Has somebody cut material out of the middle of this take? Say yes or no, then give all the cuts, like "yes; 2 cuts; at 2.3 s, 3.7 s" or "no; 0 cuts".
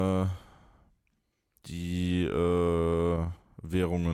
no; 0 cuts